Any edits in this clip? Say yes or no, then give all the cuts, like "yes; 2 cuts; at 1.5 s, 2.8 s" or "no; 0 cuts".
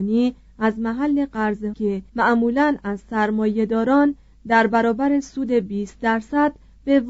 yes; 2 cuts; at 1.7 s, 2.1 s